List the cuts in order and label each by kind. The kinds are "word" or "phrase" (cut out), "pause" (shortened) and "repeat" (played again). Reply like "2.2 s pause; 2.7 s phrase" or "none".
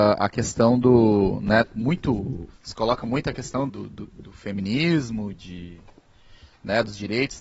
2.5 s pause; 3.7 s word; 5.3 s word